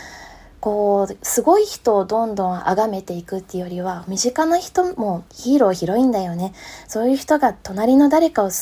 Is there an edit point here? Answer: yes; 1 cut; at 5.3 s

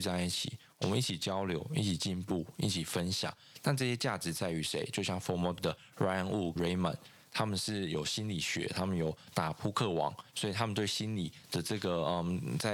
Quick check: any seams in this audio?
yes; 2 cuts; at 5.6 s, 6.6 s

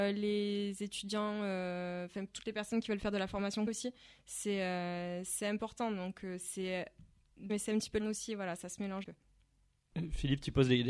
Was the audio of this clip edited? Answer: yes; 5 cuts; at 2.3 s, 3.7 s, 7.5 s, 8.0 s, 9.0 s

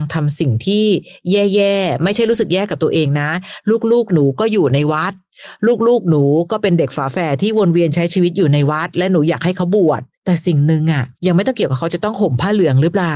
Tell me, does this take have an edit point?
yes; 2 cuts; at 10.1 s, 11.1 s

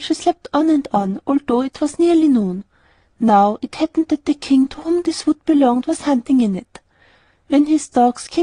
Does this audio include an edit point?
no; 0 cuts

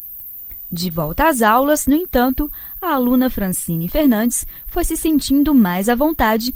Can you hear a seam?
no; 0 cuts

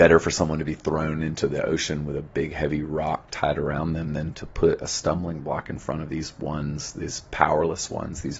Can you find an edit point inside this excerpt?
no; 0 cuts

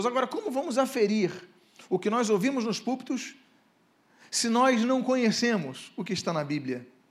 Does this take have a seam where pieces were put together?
no; 0 cuts

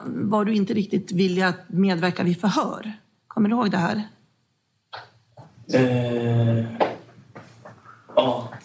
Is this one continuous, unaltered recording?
yes; 0 cuts

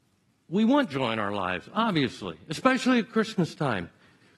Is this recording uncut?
yes; 0 cuts

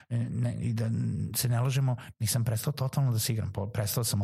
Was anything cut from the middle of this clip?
no; 0 cuts

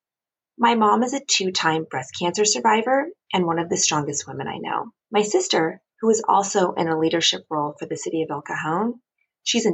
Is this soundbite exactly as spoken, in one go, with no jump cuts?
no; 2 cuts; at 5.0 s, 5.9 s

